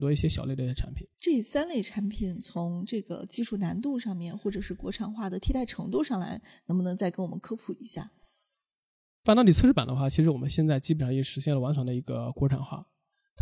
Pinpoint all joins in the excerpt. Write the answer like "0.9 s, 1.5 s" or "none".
1.1 s